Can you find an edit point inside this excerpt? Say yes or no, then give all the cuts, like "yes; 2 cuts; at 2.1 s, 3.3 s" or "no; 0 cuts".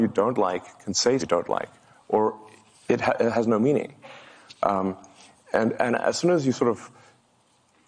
yes; 2 cuts; at 1.2 s, 5.8 s